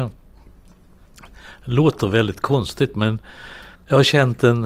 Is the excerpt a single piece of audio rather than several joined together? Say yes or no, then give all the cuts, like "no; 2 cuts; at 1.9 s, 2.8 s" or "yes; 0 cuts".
no; 1 cut; at 3.7 s